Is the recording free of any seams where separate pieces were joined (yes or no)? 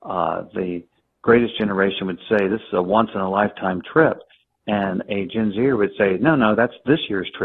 yes